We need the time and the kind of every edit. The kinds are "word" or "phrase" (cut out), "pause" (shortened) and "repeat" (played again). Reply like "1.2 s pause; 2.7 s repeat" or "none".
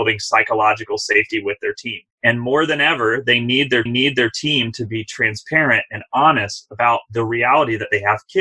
2.1 s pause; 3.9 s repeat